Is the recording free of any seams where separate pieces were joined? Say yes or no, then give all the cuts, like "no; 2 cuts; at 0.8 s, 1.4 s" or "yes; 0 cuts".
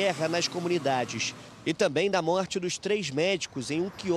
yes; 0 cuts